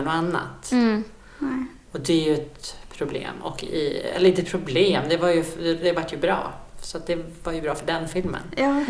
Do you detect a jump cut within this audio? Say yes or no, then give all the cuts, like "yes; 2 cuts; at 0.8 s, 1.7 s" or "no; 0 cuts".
no; 0 cuts